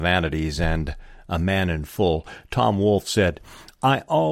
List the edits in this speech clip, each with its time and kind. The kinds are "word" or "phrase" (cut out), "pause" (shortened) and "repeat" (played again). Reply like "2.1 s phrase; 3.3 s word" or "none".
none